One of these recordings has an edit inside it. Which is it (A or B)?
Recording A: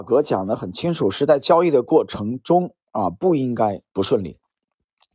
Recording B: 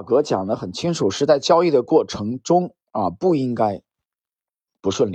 A